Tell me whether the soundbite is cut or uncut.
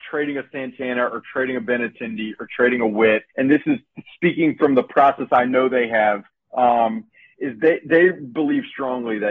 cut